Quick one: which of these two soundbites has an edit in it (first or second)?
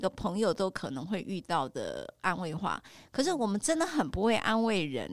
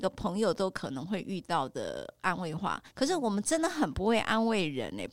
second